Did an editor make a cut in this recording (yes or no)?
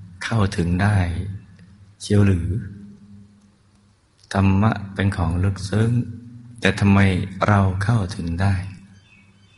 no